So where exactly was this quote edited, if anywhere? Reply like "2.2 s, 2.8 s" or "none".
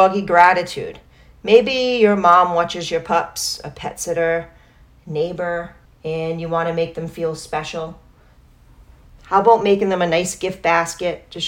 5.9 s